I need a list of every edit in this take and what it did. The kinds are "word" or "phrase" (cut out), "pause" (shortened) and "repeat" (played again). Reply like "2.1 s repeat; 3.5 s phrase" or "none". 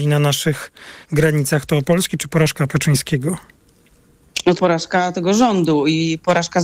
1.0 s pause; 1.8 s word; 2.7 s word; 4.6 s phrase